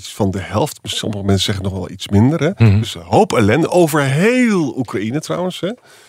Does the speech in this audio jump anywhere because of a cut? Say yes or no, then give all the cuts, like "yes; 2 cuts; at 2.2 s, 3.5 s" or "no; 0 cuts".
no; 0 cuts